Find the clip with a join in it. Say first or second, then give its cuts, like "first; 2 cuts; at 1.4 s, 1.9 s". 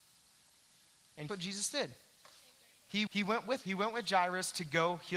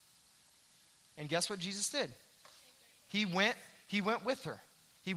first; 3 cuts; at 1.3 s, 3.1 s, 3.6 s